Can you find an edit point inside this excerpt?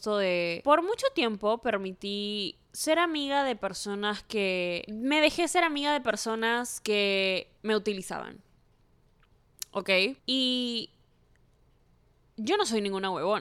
yes; 3 cuts; at 2.6 s, 7.6 s, 10.2 s

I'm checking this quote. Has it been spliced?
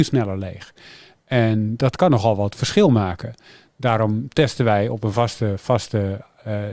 no; 0 cuts

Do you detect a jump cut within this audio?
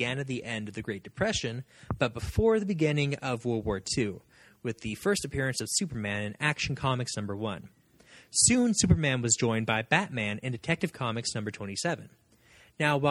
no; 0 cuts

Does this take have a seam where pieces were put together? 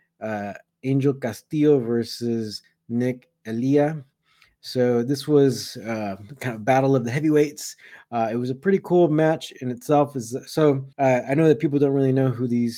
yes; 1 cut; at 10.9 s

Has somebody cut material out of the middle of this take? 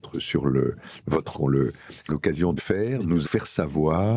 yes; 4 cuts; at 1.3 s, 2.1 s, 2.6 s, 3.2 s

